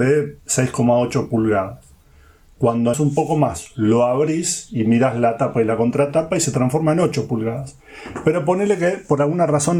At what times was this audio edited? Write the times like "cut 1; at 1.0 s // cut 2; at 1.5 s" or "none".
cut 1; at 2.9 s